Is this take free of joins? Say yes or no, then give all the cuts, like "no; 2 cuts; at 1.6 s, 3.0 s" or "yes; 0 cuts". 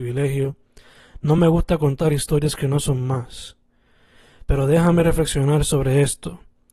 yes; 0 cuts